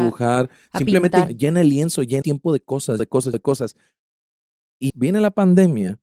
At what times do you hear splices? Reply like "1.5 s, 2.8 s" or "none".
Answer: 1.3 s, 2.2 s, 3.0 s, 3.3 s, 4.9 s